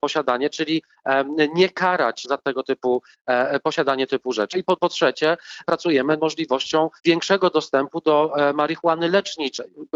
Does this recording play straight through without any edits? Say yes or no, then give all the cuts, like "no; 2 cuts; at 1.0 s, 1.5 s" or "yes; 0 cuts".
no; 6 cuts; at 2.2 s, 4.1 s, 4.8 s, 5.6 s, 6.2 s, 7.0 s